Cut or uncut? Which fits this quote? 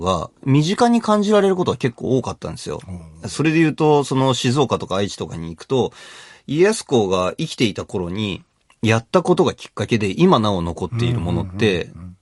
uncut